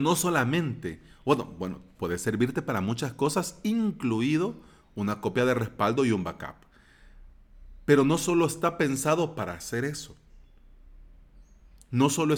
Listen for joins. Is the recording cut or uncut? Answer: uncut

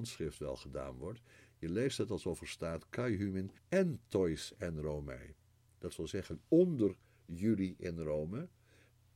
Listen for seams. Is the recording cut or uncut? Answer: cut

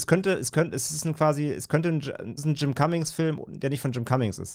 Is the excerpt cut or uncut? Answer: cut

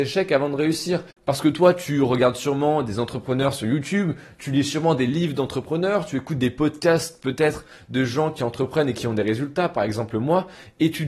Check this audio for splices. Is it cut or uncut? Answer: uncut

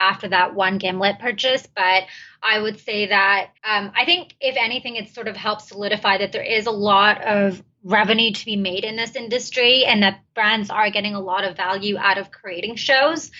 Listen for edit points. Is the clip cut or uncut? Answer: cut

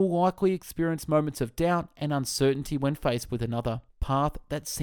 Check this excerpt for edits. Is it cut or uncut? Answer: cut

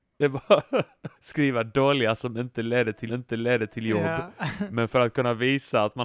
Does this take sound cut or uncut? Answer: cut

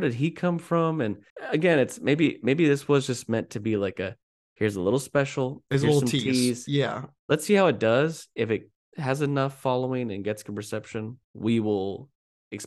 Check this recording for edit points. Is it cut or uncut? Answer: cut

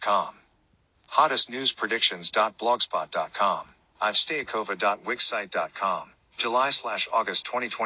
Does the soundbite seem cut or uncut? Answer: uncut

